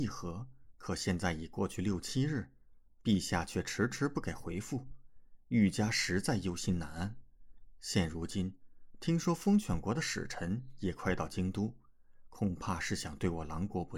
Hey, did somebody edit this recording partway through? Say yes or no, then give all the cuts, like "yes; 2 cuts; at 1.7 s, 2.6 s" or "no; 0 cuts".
no; 0 cuts